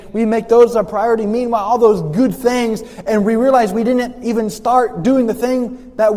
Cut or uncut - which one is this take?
uncut